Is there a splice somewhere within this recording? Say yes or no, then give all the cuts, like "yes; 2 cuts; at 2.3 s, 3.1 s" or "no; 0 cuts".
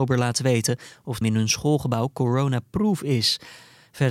yes; 1 cut; at 1.2 s